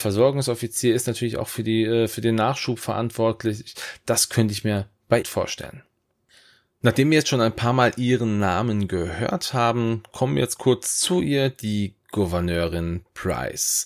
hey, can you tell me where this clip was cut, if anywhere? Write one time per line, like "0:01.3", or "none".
0:05.2